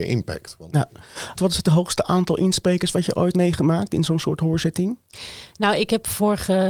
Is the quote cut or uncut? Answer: cut